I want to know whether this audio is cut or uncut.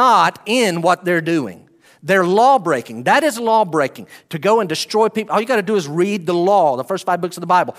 uncut